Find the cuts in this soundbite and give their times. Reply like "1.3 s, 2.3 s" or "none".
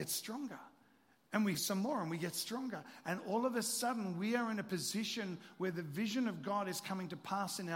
1.5 s